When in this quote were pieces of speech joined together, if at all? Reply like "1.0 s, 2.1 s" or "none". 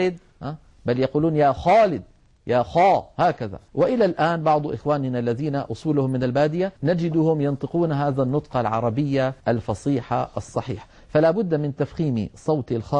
3.7 s, 6.8 s, 9.4 s